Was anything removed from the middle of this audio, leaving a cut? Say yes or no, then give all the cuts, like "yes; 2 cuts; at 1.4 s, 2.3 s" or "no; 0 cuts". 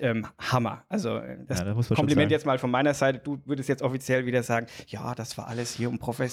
no; 0 cuts